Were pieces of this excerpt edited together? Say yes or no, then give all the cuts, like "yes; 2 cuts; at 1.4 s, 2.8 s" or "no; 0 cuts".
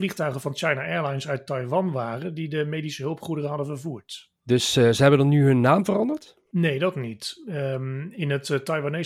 no; 0 cuts